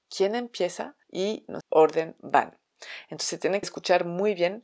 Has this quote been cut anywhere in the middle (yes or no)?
yes